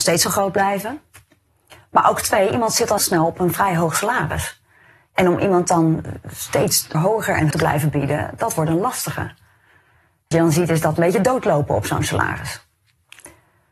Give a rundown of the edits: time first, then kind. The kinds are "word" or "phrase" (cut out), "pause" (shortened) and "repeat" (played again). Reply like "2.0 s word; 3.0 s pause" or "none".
3.0 s word; 6.9 s word; 7.5 s word; 10.3 s word; 11.0 s word